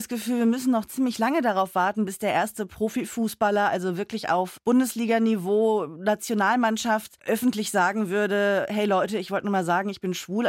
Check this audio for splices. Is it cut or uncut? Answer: uncut